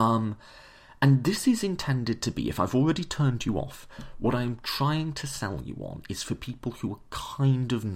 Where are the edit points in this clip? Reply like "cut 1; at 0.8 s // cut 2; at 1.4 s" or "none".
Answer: none